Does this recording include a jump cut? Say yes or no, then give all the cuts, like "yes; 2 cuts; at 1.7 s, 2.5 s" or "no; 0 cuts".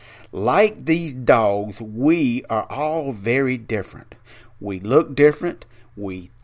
no; 0 cuts